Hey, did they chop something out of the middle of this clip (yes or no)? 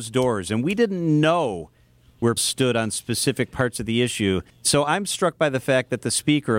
yes